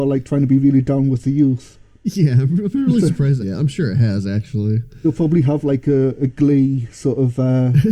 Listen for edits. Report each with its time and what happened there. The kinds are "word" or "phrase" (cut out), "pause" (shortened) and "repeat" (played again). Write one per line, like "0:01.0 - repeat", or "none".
0:03.4 - phrase